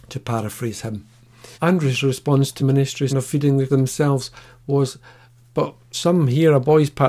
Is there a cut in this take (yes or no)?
yes